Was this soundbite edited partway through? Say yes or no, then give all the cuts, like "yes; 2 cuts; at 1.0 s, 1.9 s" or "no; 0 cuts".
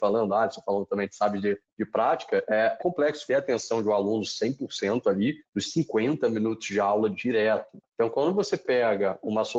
yes; 2 cuts; at 2.8 s, 3.3 s